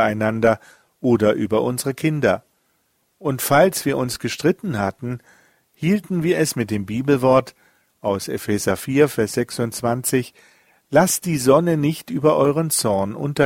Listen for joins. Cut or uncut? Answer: uncut